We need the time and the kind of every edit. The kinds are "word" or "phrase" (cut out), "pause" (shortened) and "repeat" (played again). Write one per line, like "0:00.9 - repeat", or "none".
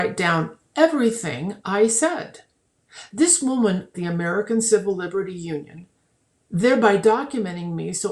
0:03.9 - phrase